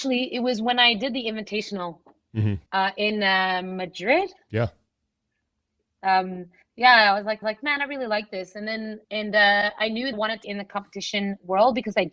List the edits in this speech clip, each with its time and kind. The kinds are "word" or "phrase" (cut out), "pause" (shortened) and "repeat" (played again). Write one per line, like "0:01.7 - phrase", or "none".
0:02.7 - pause
0:06.6 - pause
0:07.4 - repeat
0:09.0 - pause
0:10.1 - phrase
0:10.4 - word